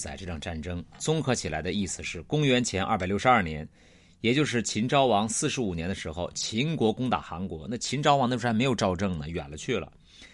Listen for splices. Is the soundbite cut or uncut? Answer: uncut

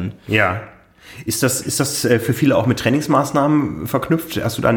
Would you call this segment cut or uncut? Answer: uncut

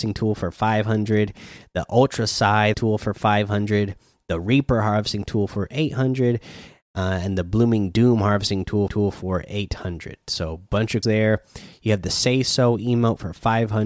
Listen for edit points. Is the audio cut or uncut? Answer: cut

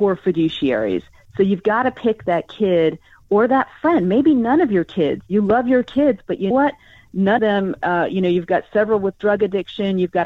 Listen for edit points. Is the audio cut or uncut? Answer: cut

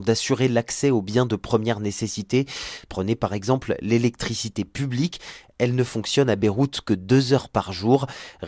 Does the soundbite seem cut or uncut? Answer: uncut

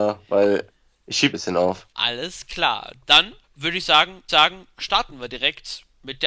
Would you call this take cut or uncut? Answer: cut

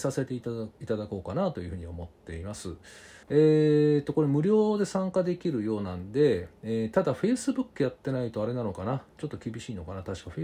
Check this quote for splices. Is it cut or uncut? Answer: cut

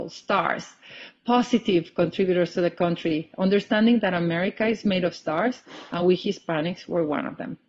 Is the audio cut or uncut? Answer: uncut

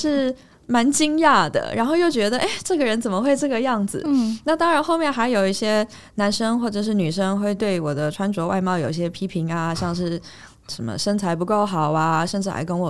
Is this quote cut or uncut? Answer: uncut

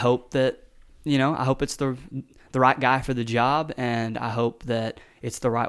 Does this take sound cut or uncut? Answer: uncut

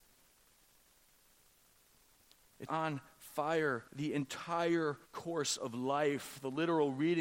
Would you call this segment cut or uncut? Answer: cut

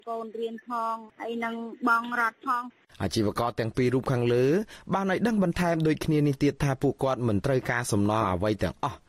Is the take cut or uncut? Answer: cut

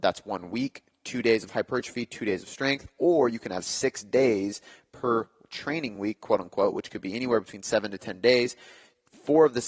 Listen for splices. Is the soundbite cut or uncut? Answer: uncut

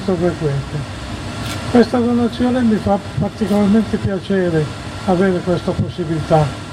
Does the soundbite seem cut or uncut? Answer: uncut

